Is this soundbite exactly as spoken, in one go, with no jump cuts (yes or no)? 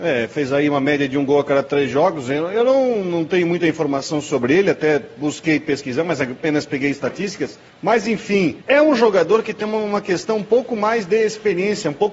no